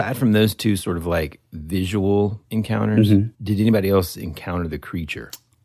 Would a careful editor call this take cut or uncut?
cut